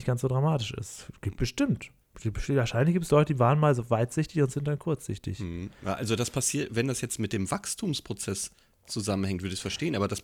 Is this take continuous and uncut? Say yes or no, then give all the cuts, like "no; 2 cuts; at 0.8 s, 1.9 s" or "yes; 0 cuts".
yes; 0 cuts